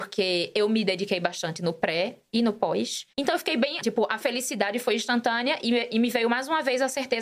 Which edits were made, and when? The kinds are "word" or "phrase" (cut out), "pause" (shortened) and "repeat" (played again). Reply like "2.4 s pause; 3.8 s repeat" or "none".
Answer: 3.1 s pause; 3.8 s word